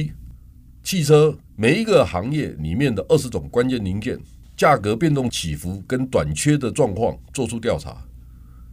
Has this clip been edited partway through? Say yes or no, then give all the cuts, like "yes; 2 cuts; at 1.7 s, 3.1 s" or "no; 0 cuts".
yes; 1 cut; at 1.4 s